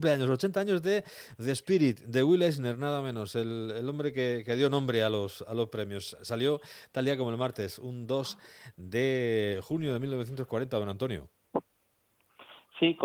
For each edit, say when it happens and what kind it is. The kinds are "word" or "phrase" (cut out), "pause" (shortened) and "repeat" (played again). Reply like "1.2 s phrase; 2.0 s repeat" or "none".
none